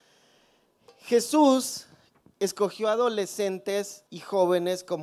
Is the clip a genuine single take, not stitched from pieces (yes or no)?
no